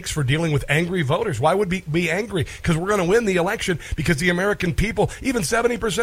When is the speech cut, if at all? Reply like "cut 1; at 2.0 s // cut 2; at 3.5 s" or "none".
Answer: none